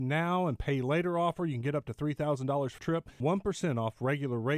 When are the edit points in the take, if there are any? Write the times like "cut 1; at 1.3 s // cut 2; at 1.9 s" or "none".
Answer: cut 1; at 2.8 s // cut 2; at 3.2 s